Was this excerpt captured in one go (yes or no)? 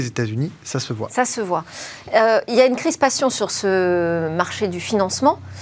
yes